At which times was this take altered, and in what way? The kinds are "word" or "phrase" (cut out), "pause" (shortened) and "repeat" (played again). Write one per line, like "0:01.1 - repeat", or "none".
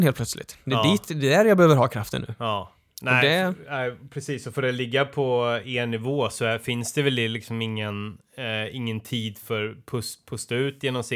none